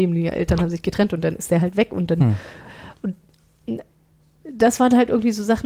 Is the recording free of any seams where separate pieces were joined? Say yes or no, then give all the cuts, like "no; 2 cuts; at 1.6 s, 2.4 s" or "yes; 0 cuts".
yes; 0 cuts